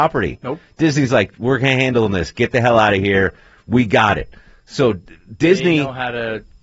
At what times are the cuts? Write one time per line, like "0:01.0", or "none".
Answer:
none